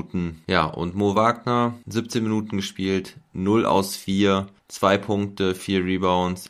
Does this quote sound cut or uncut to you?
uncut